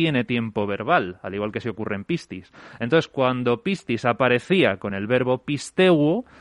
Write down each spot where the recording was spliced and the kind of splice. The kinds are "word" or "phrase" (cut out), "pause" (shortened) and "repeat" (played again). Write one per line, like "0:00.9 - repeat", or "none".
none